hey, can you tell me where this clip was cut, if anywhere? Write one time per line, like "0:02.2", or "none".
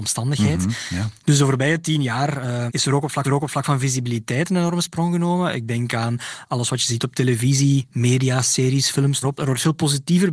0:02.7
0:03.2
0:09.2